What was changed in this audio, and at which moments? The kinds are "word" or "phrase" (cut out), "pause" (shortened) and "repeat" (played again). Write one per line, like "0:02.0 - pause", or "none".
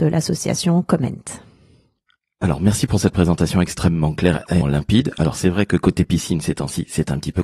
0:04.6 - word